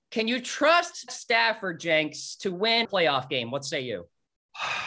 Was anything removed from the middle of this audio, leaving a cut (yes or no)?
yes